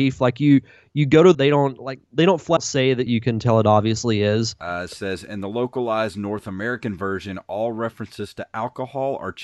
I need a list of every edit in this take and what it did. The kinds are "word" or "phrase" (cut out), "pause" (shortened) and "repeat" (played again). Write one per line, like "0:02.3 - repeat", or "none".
0:01.3 - phrase
0:02.0 - pause
0:02.6 - word
0:03.1 - phrase